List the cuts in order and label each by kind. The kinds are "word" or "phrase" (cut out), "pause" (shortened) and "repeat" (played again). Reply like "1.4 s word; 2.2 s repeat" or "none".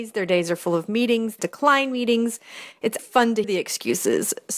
1.4 s word; 3.0 s word; 3.4 s word